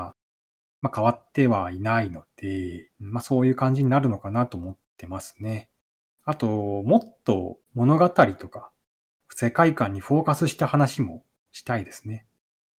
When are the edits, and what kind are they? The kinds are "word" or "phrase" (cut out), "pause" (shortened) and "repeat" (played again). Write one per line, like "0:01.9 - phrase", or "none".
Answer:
0:02.9 - pause
0:04.8 - pause
0:07.6 - pause